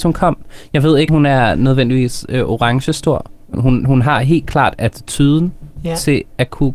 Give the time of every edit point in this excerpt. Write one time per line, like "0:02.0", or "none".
0:01.1
0:03.5

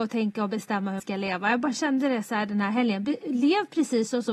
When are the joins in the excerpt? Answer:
0:01.0

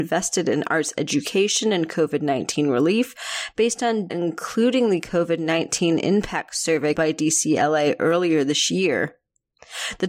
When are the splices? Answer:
0:04.1
0:06.9

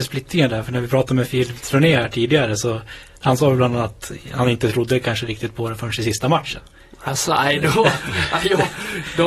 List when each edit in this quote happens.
none

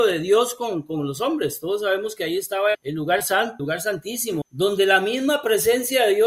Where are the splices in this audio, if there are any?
0:02.7
0:03.6
0:04.4

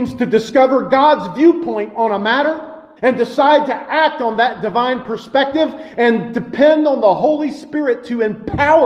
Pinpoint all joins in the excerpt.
0:03.0

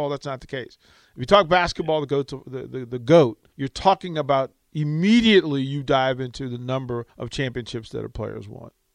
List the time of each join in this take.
0:03.5
0:04.6
0:07.1

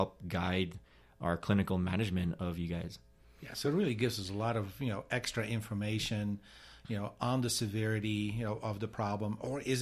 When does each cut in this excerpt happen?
none

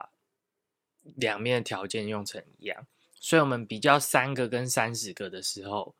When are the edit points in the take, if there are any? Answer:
0:03.0

